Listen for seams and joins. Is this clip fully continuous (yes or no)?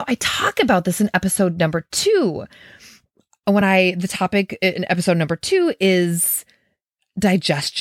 yes